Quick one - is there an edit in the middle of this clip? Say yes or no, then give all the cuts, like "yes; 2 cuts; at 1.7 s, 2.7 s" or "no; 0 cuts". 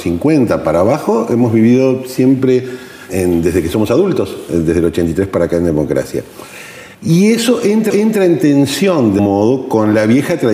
yes; 4 cuts; at 3.1 s, 6.9 s, 7.9 s, 9.2 s